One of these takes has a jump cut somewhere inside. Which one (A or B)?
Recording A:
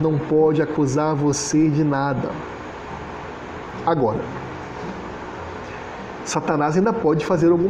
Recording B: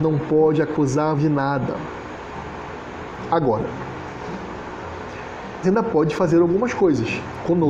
B